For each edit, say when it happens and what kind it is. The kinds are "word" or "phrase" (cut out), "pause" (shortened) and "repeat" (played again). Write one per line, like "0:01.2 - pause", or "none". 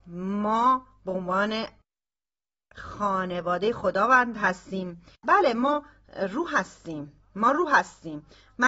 0:05.2 - pause